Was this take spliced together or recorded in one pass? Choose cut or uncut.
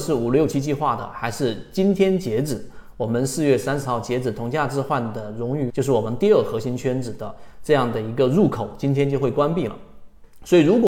cut